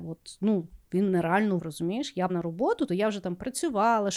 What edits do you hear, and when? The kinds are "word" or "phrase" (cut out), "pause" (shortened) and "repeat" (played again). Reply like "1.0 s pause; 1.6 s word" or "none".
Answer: 1.6 s word; 2.3 s word; 2.9 s word